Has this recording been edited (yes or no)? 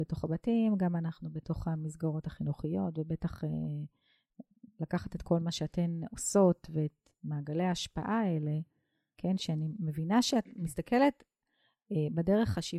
no